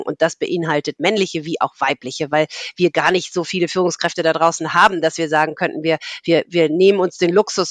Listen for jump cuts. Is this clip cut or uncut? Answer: uncut